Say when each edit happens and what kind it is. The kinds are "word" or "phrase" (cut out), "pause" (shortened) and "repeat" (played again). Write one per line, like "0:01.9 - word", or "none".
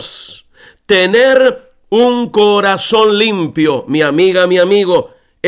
none